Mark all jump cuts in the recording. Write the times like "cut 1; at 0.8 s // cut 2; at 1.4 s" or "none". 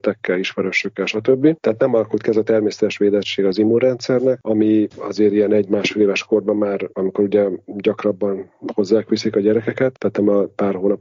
none